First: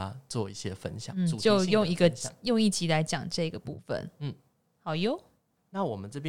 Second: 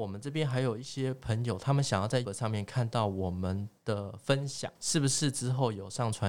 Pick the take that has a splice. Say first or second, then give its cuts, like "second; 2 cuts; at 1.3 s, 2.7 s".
second; 2 cuts; at 2.3 s, 4.8 s